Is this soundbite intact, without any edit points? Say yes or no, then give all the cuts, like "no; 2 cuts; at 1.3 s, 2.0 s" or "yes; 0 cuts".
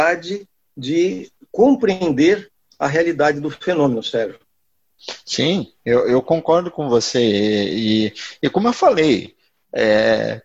yes; 0 cuts